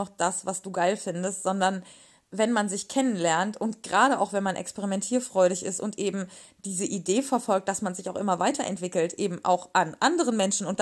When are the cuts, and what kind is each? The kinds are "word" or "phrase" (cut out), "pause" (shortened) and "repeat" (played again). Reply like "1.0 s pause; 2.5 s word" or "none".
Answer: none